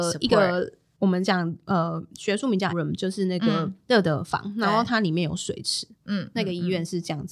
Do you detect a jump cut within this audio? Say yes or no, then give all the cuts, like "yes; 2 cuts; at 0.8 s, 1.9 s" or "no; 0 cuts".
yes; 1 cut; at 2.7 s